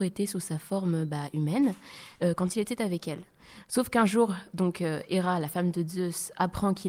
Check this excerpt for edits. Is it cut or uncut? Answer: uncut